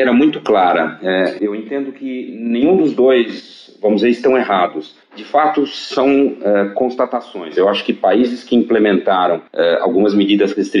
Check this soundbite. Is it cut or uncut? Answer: cut